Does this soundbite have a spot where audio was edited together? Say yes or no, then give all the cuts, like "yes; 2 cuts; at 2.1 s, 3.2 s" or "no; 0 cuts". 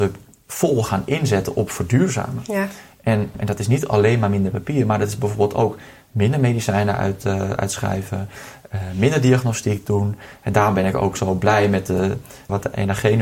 no; 0 cuts